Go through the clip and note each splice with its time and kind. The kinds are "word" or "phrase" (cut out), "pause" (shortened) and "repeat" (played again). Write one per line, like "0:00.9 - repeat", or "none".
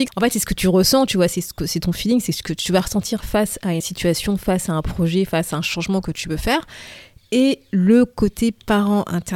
0:03.8 - word